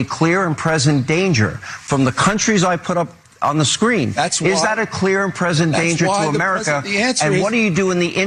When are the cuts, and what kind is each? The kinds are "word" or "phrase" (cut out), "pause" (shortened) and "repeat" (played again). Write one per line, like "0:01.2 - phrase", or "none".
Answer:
none